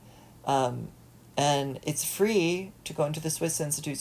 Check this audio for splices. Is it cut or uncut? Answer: uncut